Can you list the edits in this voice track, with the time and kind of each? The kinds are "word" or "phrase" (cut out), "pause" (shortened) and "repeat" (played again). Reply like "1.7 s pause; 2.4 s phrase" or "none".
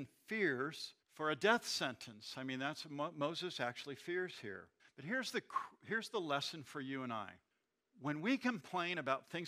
1.0 s pause; 4.8 s pause; 7.5 s pause